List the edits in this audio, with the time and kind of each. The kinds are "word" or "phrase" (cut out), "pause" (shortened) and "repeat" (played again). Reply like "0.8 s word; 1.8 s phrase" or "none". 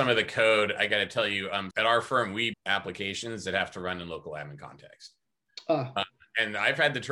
1.7 s word; 2.5 s word